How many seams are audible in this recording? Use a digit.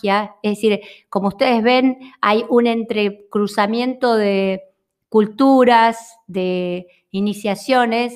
0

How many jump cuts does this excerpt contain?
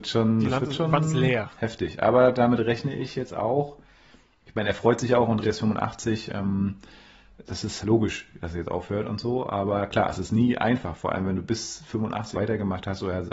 3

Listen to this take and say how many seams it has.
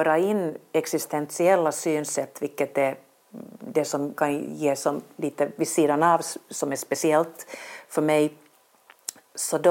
1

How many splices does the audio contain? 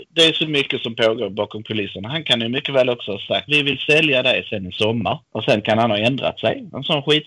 2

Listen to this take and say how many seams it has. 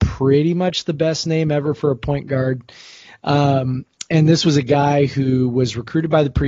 0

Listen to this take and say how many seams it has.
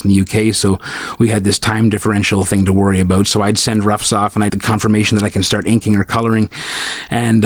1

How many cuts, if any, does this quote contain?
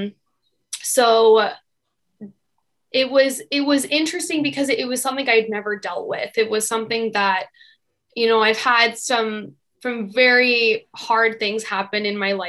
0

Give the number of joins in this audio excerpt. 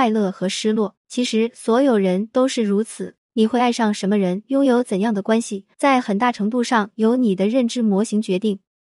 3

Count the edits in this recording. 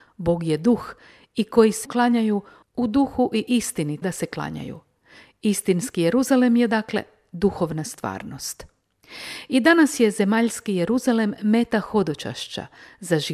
2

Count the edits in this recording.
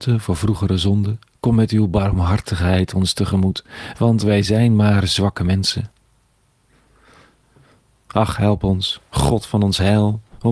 0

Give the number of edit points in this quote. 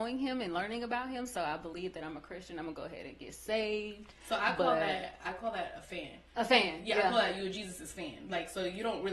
1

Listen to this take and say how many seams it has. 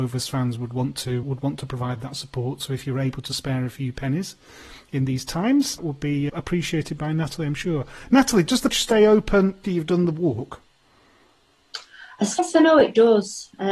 6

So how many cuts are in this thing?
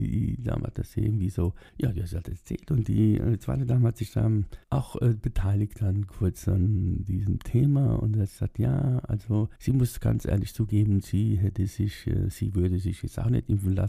3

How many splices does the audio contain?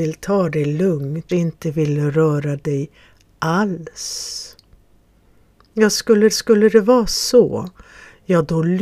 2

